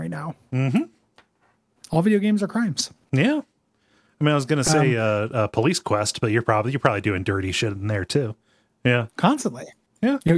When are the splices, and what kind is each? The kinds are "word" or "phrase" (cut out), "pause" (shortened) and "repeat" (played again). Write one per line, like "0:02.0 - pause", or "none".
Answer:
none